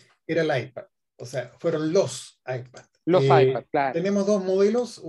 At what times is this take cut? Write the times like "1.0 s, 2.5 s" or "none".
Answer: none